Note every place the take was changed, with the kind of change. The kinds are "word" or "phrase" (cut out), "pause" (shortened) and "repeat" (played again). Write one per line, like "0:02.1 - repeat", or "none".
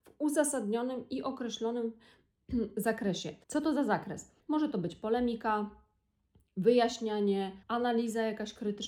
0:03.4 - pause
0:04.4 - pause
0:07.6 - pause